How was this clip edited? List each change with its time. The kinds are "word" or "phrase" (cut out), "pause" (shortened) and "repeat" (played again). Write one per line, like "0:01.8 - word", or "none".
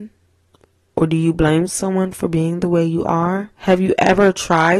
0:03.6 - pause